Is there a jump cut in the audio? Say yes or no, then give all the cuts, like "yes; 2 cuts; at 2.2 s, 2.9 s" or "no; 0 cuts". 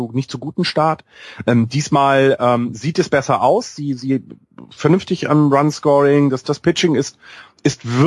no; 0 cuts